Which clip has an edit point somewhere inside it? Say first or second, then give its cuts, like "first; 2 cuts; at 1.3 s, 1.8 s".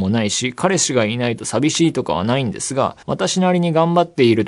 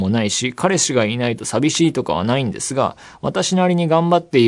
first; 1 cut; at 3.0 s